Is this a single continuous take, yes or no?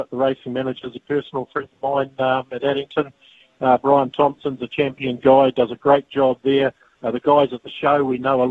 yes